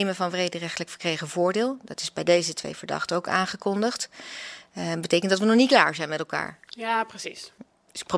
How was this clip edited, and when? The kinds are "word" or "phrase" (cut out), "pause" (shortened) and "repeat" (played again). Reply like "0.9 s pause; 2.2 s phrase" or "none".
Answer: none